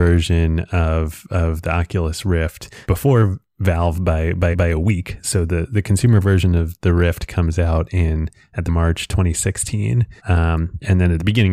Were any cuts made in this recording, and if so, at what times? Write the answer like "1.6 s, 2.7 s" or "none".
2.8 s, 4.5 s, 8.7 s, 10.2 s